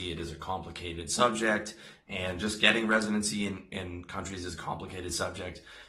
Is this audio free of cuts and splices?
yes; 0 cuts

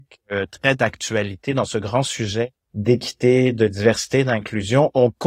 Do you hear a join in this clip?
yes; 1 cut; at 2.6 s

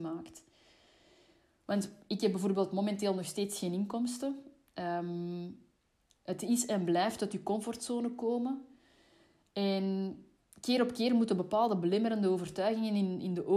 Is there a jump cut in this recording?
no; 0 cuts

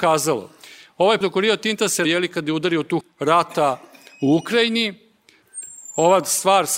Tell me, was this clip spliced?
yes; 3 cuts; at 1.2 s, 2.0 s, 3.0 s

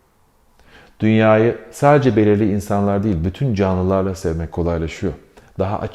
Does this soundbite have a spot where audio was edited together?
no; 0 cuts

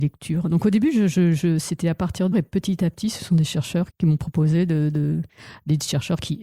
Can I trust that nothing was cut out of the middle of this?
no; 2 cuts; at 2.3 s, 3.9 s

